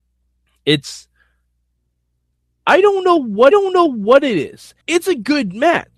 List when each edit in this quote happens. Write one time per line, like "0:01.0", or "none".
0:03.5
0:04.8